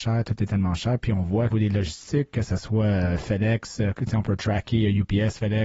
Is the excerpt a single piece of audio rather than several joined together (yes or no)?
no